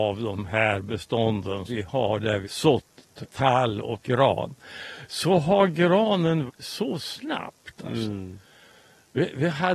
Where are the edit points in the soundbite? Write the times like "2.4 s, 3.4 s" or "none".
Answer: 1.7 s, 2.4 s, 3.3 s, 4.0 s, 6.5 s